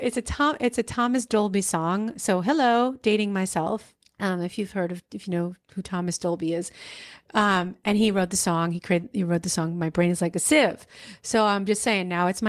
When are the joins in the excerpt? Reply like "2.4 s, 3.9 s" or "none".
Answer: 4.0 s